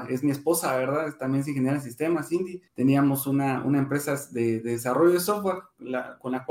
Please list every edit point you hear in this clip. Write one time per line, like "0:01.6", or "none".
0:02.7